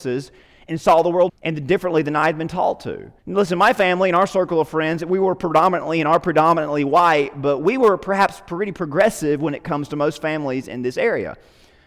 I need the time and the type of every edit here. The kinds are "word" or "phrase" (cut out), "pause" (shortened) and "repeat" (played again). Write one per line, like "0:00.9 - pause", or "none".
0:01.3 - phrase
0:03.2 - pause